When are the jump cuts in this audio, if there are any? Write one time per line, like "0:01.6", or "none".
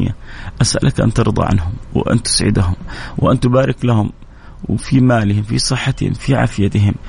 none